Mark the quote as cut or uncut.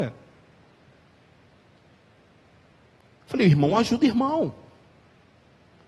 uncut